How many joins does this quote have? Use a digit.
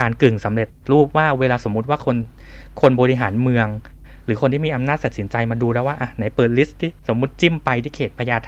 1